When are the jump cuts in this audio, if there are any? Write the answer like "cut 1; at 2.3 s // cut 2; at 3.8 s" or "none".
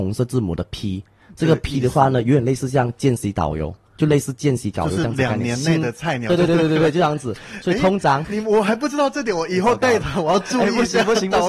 cut 1; at 8.2 s